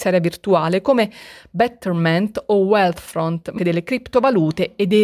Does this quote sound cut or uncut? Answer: cut